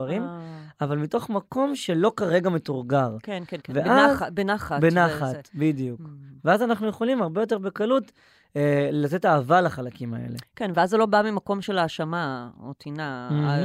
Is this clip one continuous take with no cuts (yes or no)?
no